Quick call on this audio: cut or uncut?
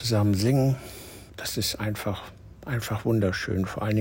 cut